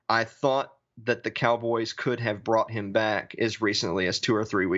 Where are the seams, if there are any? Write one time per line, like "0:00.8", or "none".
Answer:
none